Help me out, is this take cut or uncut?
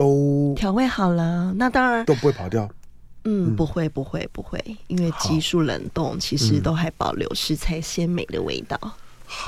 uncut